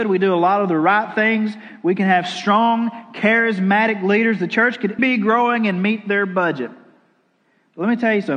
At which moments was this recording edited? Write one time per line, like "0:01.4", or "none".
0:05.0

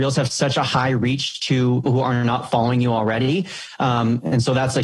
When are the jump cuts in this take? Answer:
0:01.9

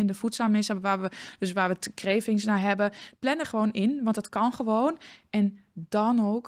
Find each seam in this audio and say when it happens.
0:03.4

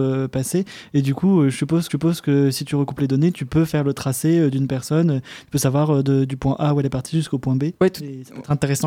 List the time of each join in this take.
0:01.9
0:07.7

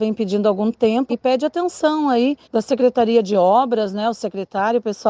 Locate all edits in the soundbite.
0:01.1
0:02.4

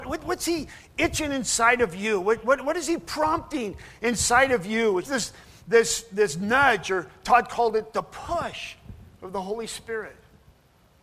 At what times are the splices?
0:05.0

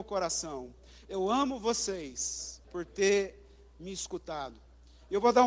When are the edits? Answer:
0:02.6

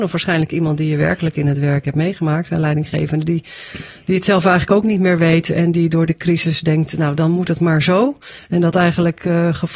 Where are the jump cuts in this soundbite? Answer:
none

